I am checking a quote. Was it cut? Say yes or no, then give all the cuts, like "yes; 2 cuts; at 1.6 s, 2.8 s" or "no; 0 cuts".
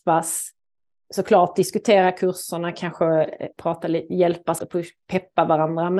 yes; 1 cut; at 4.6 s